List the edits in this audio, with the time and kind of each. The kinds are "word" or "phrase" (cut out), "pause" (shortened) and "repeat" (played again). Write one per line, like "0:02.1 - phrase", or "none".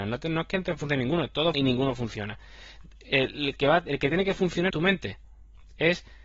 0:01.5 - word
0:04.7 - word